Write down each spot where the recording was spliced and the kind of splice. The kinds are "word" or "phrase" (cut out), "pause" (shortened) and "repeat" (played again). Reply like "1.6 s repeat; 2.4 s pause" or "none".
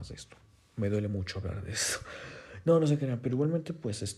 none